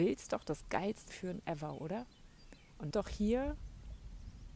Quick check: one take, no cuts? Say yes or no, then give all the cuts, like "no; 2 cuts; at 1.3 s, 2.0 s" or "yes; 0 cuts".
no; 2 cuts; at 1.1 s, 2.9 s